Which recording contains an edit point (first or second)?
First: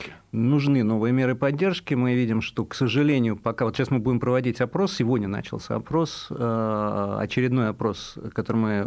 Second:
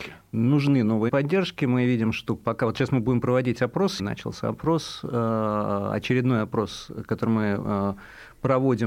second